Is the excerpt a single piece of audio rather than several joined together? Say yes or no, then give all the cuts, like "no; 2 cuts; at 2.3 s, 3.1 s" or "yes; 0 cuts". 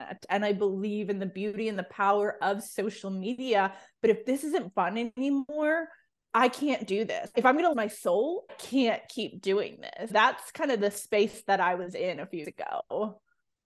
no; 6 cuts; at 6.3 s, 7.3 s, 7.7 s, 8.5 s, 10.1 s, 12.4 s